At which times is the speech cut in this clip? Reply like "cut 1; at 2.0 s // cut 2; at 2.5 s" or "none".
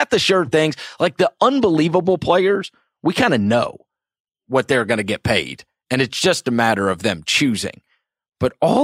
none